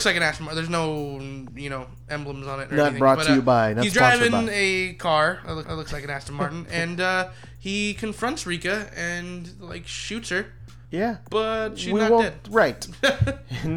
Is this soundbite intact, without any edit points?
no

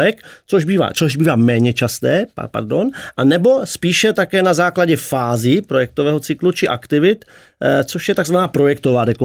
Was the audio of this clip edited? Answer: yes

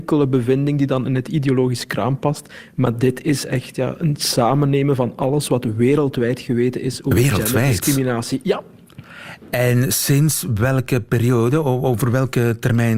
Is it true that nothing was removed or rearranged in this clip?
yes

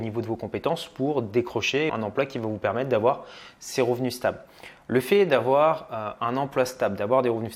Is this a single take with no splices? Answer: no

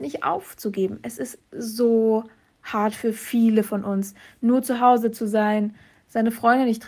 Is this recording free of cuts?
yes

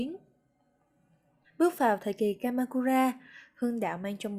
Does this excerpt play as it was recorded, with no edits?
yes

